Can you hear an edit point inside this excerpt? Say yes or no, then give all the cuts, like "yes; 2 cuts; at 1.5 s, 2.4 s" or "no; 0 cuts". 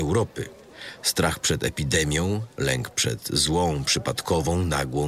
no; 0 cuts